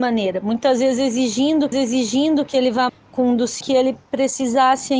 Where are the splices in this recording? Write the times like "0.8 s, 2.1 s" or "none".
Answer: 1.7 s, 2.9 s, 3.6 s